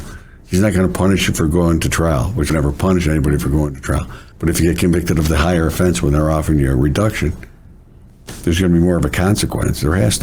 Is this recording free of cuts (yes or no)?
no